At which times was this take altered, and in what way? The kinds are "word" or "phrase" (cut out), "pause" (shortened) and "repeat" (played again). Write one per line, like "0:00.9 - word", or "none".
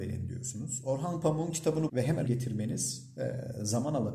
0:01.9 - word
0:02.2 - word